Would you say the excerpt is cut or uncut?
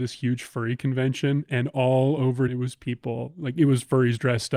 cut